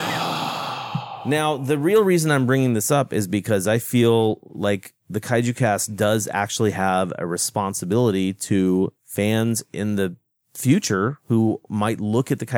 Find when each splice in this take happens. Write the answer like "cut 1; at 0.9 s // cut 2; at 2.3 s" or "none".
cut 1; at 5.0 s